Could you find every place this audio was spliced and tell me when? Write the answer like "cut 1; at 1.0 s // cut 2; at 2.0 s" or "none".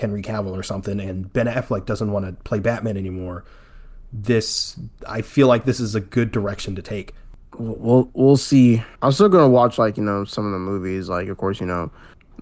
cut 1; at 8.9 s